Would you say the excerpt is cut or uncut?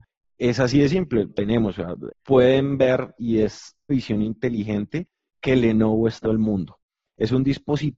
cut